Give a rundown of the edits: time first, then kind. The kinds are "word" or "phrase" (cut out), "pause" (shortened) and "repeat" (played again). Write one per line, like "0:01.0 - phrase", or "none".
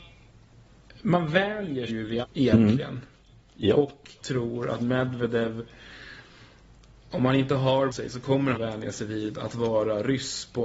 0:01.9 - word
0:02.2 - word
0:04.2 - word
0:04.8 - word
0:07.9 - word
0:08.5 - word